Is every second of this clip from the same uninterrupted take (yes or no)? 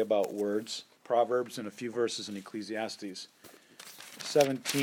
no